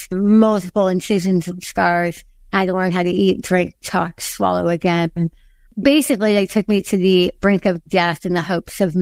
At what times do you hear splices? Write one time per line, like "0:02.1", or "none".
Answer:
none

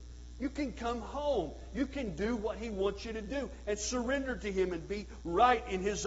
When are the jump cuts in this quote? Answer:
none

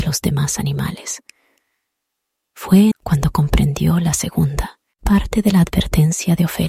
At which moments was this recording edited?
0:02.9

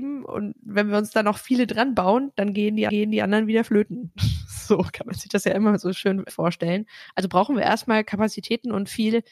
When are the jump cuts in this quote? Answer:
0:02.9
0:06.3

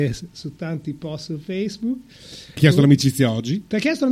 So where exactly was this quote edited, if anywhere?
0:02.6

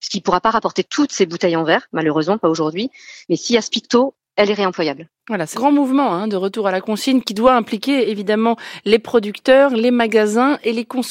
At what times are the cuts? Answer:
0:05.5

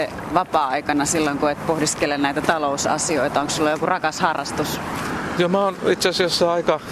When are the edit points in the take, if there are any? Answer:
none

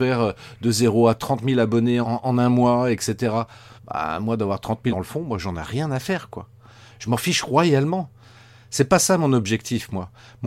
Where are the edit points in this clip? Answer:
0:02.0
0:03.8
0:04.9

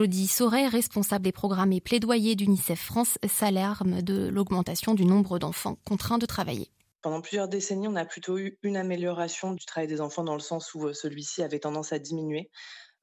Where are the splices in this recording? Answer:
none

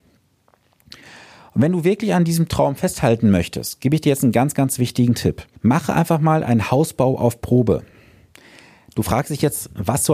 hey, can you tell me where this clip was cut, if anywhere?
0:05.6

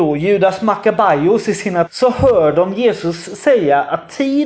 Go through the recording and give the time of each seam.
0:01.9

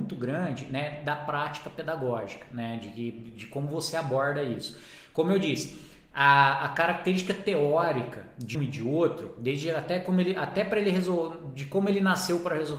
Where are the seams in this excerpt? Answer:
0:08.5

